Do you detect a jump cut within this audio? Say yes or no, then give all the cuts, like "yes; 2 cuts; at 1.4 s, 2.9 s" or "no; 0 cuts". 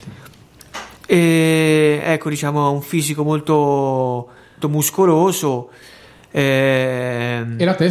yes; 2 cuts; at 1.0 s, 4.6 s